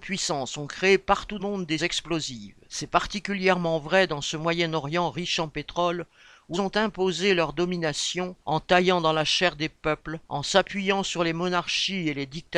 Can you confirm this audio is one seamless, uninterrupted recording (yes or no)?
no